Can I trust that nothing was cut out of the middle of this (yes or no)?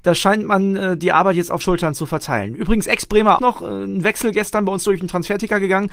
no